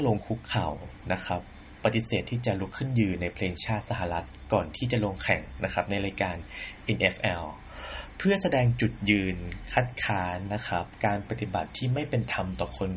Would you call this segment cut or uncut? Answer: uncut